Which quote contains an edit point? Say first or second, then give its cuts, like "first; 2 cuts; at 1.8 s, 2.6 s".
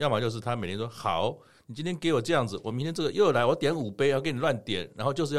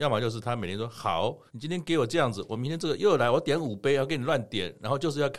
second; 1 cut; at 1.5 s